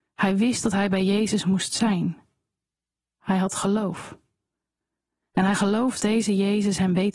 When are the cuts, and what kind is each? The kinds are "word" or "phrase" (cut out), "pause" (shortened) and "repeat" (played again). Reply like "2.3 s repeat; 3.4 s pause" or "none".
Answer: 6.0 s word